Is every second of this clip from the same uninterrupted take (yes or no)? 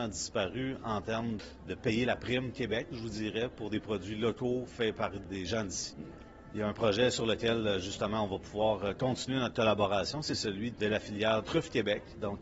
yes